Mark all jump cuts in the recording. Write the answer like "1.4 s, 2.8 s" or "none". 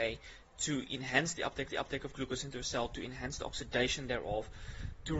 1.7 s